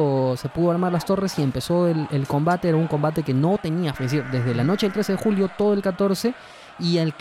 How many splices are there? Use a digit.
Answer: 1